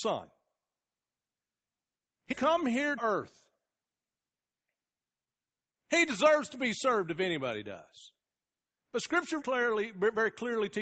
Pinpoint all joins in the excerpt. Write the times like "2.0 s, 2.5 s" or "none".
2.3 s, 3.0 s, 9.4 s